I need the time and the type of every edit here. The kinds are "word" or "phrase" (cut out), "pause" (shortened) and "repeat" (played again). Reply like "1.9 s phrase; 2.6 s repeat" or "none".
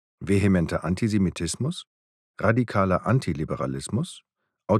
none